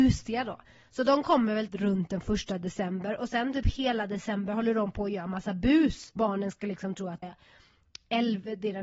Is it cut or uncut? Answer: cut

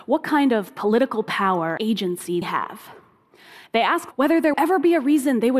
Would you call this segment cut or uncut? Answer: cut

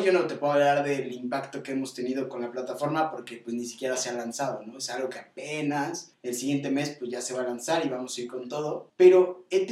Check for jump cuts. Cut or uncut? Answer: uncut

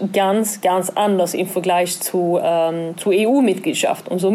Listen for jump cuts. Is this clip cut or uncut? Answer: uncut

